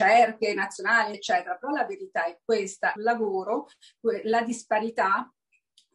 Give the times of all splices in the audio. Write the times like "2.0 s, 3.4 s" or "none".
1.1 s, 3.0 s

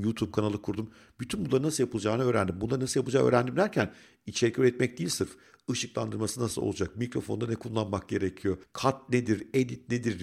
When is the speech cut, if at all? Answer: none

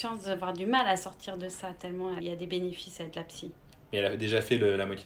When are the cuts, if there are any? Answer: 2.2 s

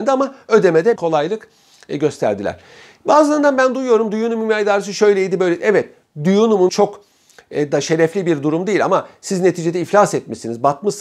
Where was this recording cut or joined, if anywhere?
1.0 s, 6.7 s

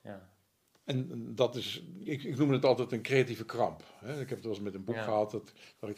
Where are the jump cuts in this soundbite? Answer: 2.1 s

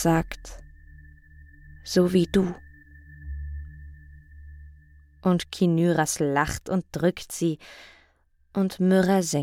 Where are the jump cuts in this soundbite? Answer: none

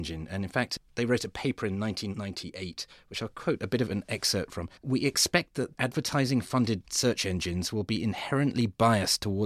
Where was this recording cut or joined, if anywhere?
4.8 s

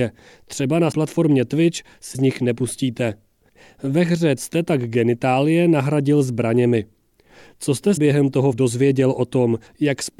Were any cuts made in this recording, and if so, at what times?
0.9 s, 2.1 s, 4.4 s, 8.0 s, 8.5 s

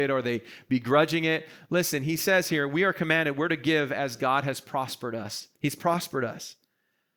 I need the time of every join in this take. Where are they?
5.6 s

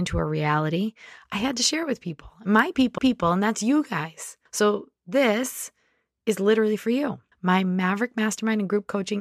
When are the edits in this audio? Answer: 3.0 s, 4.5 s, 7.3 s

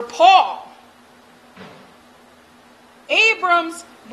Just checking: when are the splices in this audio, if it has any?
none

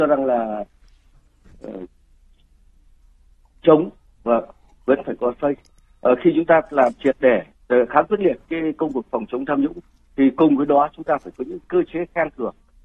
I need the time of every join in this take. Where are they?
none

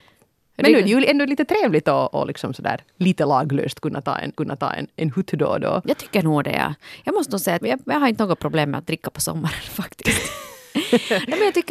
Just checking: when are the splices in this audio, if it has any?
4.4 s, 7.6 s

